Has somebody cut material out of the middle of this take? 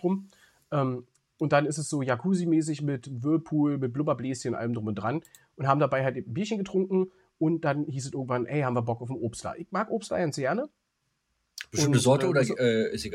no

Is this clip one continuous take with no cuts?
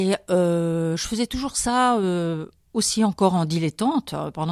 yes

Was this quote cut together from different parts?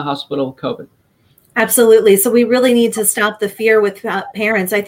no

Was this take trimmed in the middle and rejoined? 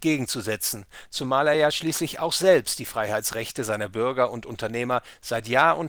no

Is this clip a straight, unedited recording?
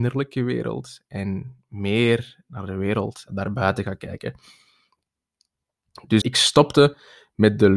no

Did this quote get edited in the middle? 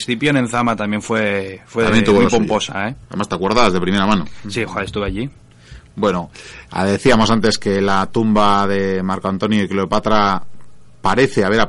yes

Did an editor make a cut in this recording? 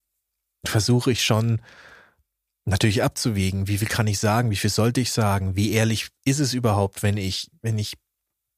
no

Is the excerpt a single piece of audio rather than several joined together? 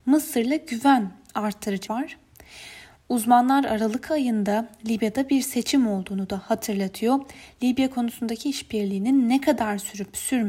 no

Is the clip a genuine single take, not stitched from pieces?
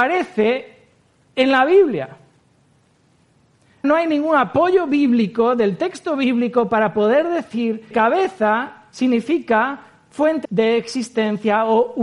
no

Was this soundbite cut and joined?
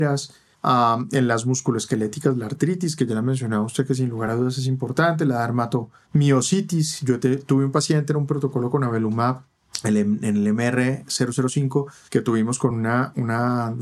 no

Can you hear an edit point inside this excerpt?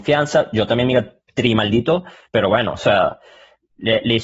no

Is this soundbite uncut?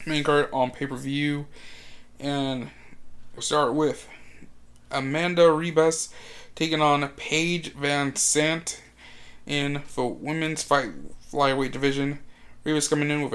no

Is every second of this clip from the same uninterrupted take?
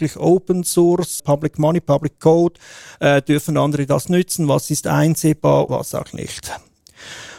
no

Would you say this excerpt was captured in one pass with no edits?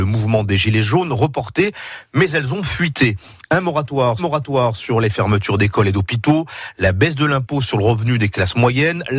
no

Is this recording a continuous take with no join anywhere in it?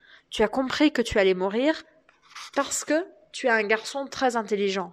yes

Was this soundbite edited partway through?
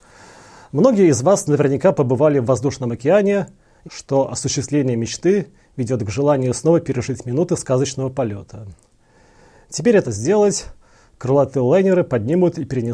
yes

